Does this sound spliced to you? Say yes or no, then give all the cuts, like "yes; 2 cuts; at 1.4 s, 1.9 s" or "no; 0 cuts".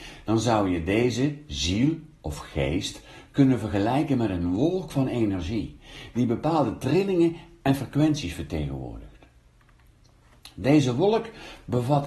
no; 0 cuts